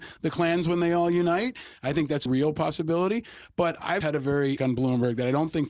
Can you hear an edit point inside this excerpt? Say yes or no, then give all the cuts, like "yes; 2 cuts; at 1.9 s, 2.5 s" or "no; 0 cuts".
yes; 3 cuts; at 2.3 s, 4.0 s, 4.6 s